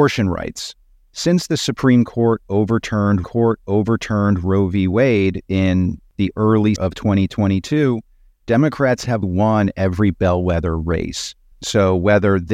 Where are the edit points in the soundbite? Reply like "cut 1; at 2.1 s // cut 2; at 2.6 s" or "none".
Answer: cut 1; at 3.2 s // cut 2; at 6.8 s // cut 3; at 9.2 s